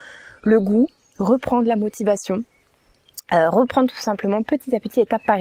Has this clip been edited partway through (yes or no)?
no